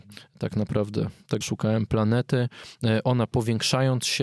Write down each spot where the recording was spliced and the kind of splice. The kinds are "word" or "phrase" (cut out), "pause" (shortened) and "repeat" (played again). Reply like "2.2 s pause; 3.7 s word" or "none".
1.4 s word